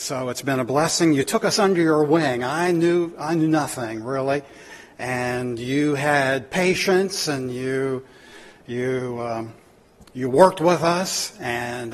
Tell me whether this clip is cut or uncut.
uncut